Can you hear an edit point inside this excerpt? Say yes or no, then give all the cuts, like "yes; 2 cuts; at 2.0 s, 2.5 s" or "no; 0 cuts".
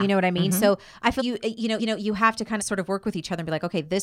yes; 3 cuts; at 1.2 s, 1.8 s, 2.6 s